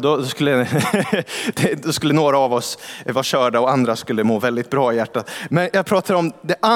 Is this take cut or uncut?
uncut